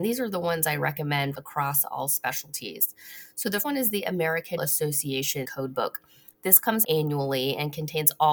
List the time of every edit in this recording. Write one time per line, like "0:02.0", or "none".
0:01.3
0:03.6
0:04.6
0:05.4
0:06.8